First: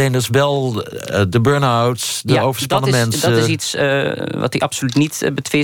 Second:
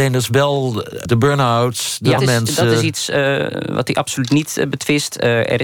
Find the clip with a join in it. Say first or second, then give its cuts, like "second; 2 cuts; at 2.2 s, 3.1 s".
second; 2 cuts; at 1.1 s, 2.2 s